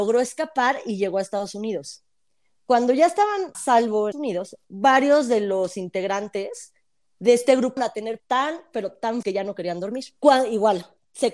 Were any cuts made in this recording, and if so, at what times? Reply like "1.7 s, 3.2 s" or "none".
3.5 s, 4.1 s, 7.8 s, 8.2 s, 9.2 s